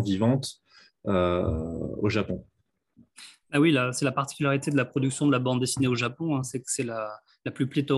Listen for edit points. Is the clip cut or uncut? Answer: uncut